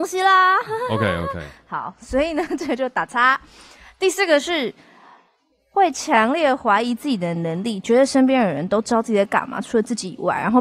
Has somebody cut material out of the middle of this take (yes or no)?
no